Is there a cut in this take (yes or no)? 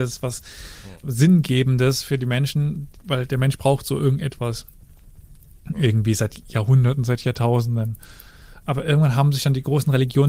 yes